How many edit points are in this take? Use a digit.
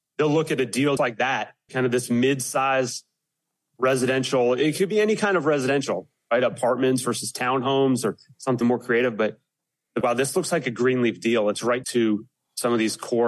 5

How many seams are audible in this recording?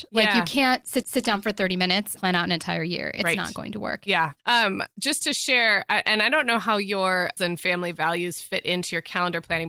4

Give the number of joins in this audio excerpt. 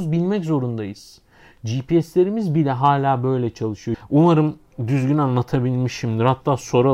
0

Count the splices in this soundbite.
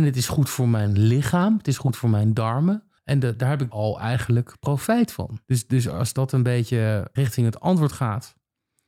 4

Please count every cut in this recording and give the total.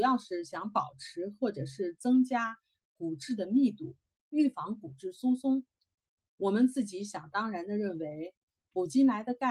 0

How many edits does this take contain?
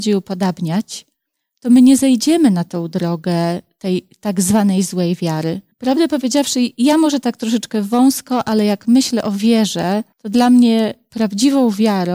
3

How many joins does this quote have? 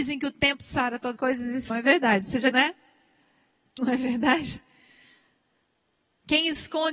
4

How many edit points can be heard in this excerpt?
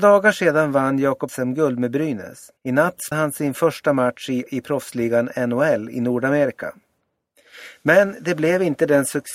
4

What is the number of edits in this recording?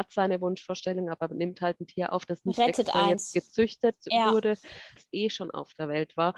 1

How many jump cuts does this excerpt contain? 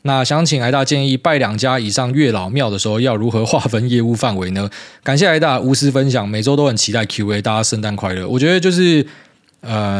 0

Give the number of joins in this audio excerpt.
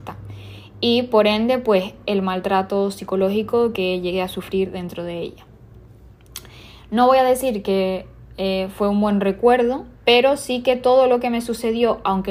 1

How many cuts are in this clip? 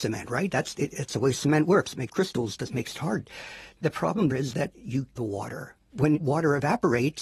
4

